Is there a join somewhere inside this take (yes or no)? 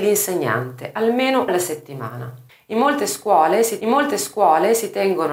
yes